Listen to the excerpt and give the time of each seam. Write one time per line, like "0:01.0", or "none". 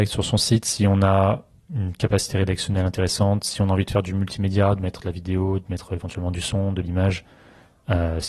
none